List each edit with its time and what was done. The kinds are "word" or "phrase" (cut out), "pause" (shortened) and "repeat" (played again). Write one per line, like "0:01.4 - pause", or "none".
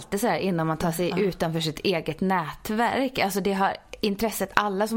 none